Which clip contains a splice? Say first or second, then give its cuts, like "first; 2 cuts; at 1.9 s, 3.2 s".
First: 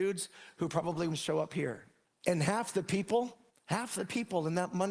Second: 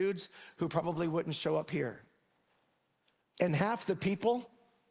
first; 3 cuts; at 1.1 s, 2.0 s, 3.5 s